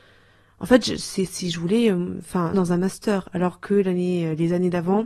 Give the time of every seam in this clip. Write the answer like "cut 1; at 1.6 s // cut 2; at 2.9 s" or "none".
cut 1; at 2.5 s